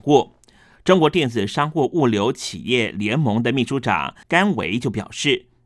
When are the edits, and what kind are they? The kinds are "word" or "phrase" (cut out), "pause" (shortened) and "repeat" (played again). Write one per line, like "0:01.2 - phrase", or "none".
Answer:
0:04.2 - pause